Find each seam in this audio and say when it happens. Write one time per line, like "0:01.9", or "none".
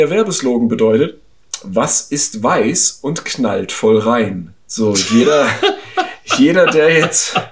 0:04.6

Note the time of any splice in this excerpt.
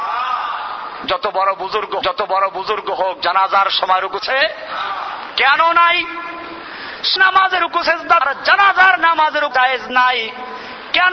0:02.0
0:04.2
0:07.2
0:08.2
0:09.5

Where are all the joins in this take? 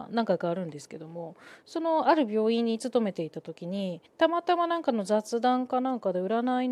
0:04.1

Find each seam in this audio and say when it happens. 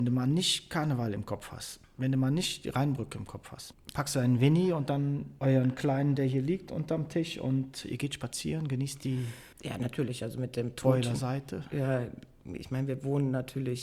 0:09.5

